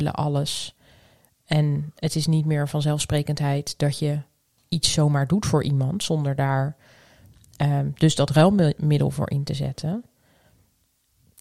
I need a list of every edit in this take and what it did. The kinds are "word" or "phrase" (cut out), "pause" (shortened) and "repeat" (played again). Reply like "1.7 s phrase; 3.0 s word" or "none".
none